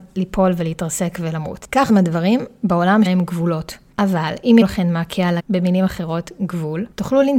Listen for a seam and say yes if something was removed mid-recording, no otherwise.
yes